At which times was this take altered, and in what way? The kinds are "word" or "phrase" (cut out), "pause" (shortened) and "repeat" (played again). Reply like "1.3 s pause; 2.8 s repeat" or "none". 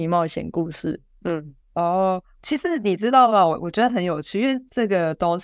1.6 s pause